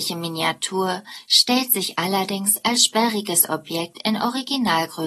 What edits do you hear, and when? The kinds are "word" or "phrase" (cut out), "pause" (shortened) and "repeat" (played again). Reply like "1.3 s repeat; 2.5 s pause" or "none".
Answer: none